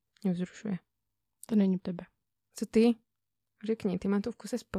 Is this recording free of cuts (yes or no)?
no